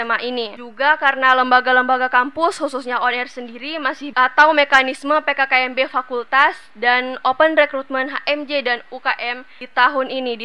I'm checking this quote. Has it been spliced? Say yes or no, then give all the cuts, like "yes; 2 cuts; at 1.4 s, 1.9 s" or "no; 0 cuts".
yes; 1 cut; at 4.1 s